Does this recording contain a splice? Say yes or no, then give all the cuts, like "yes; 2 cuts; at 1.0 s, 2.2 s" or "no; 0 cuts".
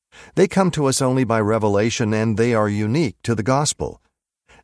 no; 0 cuts